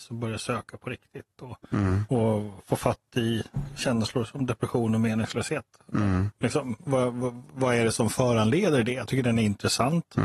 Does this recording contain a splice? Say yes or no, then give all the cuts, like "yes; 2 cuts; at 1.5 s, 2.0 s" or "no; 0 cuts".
yes; 1 cut; at 1.6 s